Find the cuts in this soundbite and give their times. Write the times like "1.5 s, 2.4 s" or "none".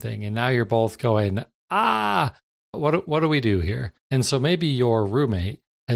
2.7 s, 4.0 s